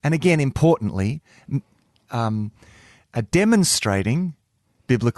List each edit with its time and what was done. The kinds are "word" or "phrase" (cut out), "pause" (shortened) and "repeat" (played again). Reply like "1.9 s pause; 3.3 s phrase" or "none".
none